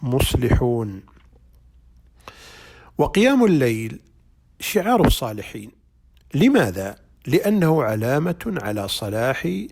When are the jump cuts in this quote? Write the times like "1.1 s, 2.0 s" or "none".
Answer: none